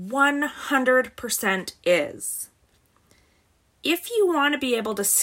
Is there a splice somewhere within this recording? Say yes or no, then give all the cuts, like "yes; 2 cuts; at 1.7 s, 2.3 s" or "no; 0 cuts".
no; 0 cuts